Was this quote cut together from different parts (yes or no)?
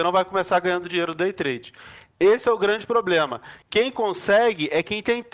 yes